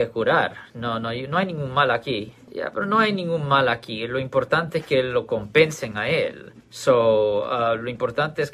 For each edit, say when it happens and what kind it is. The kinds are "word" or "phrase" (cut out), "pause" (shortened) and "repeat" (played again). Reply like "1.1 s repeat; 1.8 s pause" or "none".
6.6 s pause